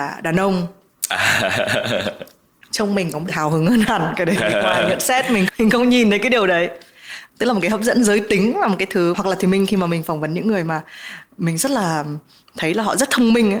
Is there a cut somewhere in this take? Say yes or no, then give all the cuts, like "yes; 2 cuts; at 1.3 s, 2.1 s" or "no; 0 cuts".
yes; 4 cuts; at 3.3 s, 4.4 s, 5.5 s, 9.1 s